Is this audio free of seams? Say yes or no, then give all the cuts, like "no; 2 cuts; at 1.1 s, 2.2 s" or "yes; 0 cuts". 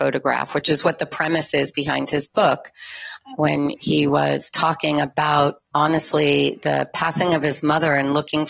no; 1 cut; at 5.7 s